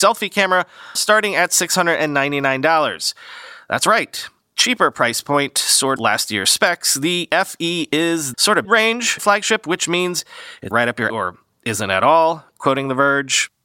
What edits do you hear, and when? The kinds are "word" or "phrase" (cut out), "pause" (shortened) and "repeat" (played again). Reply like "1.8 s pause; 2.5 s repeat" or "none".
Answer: 1.0 s word; 6.0 s word; 7.3 s word; 8.3 s word; 8.6 s word; 9.2 s word; 10.7 s word; 11.1 s word